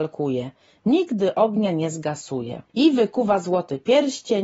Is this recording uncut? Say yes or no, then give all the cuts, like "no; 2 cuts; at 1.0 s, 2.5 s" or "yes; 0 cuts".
no; 1 cut; at 2.7 s